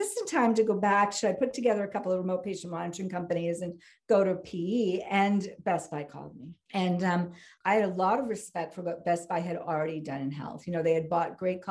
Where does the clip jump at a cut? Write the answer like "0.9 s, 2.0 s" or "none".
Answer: 6.6 s